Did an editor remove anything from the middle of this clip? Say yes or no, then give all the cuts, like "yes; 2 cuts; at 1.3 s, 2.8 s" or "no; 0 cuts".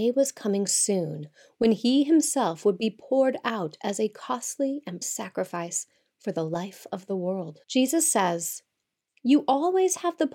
yes; 2 cuts; at 5.0 s, 7.6 s